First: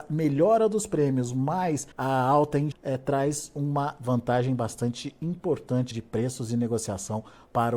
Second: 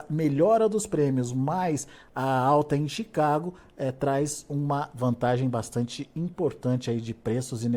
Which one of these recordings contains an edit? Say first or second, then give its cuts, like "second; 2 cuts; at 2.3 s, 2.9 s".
first; 3 cuts; at 1.9 s, 2.7 s, 5.9 s